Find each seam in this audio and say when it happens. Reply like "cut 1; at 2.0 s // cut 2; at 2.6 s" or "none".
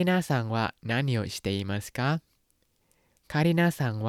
none